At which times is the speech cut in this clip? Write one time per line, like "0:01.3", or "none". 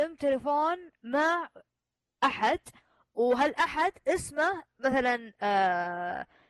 0:04.7